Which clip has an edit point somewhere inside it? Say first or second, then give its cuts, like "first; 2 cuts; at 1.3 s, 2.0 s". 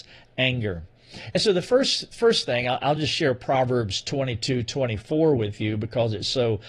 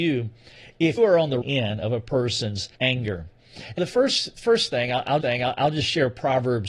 second; 5 cuts; at 1.0 s, 1.4 s, 2.7 s, 3.8 s, 5.2 s